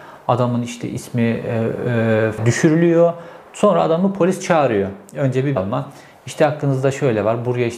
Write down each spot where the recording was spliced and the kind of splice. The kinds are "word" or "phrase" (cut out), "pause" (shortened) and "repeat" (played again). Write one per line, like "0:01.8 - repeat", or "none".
0:02.4 - phrase
0:05.6 - word

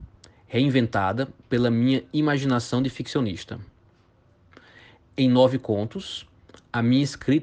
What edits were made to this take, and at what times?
none

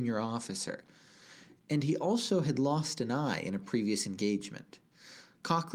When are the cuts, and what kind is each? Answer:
none

